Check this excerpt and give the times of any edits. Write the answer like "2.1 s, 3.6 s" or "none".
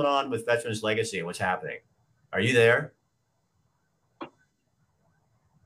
1.9 s